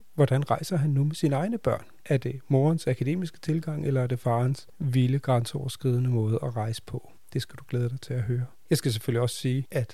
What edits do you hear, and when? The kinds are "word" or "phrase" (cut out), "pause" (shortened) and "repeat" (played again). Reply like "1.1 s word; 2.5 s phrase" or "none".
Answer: none